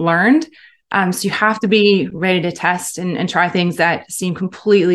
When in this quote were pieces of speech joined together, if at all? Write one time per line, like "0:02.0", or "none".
none